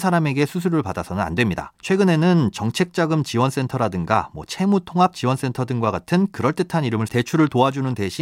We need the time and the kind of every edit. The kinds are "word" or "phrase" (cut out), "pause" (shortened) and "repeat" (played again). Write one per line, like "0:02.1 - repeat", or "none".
0:01.8 - pause
0:07.1 - word